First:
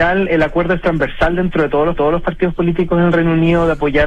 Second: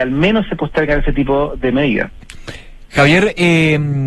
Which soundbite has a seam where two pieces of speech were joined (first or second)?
first